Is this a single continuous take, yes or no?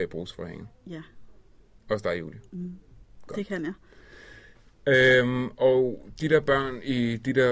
yes